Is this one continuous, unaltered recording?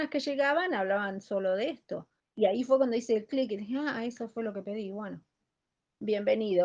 no; 1 cut; at 2.2 s

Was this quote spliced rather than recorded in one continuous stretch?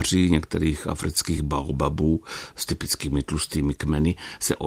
no; 0 cuts

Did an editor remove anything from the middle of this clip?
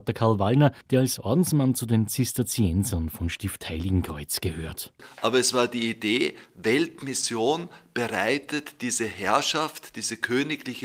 no; 0 cuts

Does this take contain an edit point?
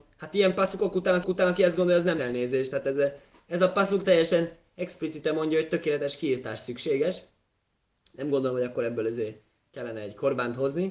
yes; 3 cuts; at 1.2 s, 2.2 s, 4.0 s

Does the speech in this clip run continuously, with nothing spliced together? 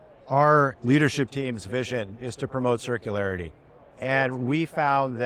yes; 0 cuts

